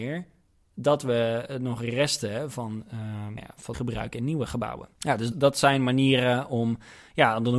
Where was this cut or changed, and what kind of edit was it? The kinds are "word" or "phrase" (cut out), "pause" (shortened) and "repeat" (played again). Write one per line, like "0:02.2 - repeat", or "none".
0:03.4 - word
0:03.7 - phrase
0:05.3 - word